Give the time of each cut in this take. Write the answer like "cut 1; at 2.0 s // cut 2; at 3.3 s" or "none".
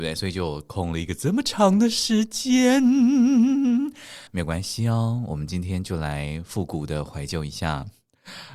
cut 1; at 4.3 s

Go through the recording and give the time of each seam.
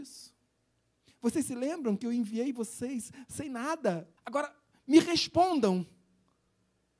cut 1; at 4.2 s

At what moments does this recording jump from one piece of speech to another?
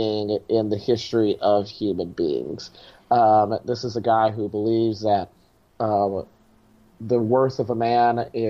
none

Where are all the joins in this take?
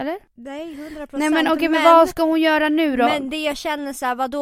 none

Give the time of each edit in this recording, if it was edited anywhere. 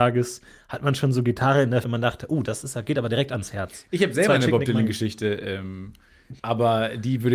cut 1; at 1.8 s // cut 2; at 6.4 s

